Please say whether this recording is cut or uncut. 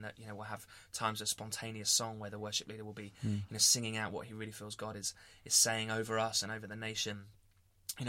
uncut